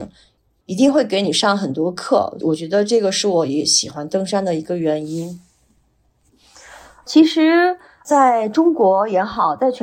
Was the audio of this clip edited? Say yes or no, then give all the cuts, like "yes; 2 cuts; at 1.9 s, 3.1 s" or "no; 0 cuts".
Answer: no; 0 cuts